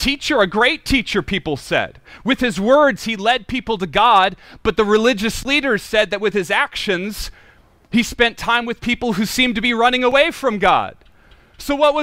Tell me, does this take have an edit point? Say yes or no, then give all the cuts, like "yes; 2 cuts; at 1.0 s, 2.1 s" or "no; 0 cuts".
no; 0 cuts